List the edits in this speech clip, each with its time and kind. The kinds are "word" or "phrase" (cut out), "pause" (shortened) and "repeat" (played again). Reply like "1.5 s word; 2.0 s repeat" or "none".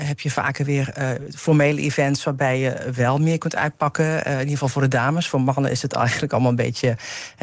none